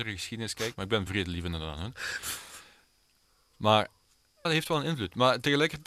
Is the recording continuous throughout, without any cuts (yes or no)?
no